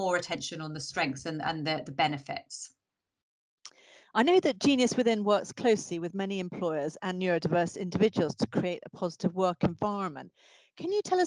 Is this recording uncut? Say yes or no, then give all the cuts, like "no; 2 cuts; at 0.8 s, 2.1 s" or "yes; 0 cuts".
yes; 0 cuts